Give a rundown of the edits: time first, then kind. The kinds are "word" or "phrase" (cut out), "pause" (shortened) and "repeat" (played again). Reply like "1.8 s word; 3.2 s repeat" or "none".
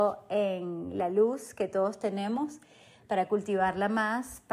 none